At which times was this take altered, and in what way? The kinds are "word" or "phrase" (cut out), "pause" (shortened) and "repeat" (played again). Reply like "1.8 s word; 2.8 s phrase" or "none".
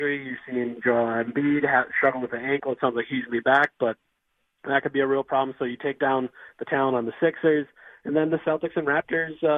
none